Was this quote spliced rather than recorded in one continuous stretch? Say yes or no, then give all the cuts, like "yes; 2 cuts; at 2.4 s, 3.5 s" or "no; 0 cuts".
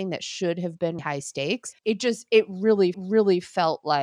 yes; 3 cuts; at 1.0 s, 1.8 s, 2.9 s